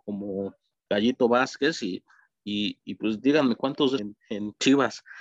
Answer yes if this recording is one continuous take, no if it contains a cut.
no